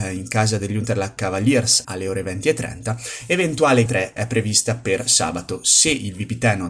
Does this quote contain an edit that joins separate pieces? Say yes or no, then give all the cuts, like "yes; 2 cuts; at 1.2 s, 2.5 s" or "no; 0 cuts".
yes; 3 cuts; at 1.8 s, 3.9 s, 4.2 s